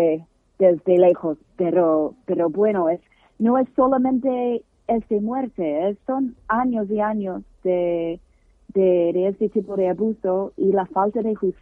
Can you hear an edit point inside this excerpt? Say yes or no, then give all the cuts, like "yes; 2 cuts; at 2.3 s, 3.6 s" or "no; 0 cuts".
no; 0 cuts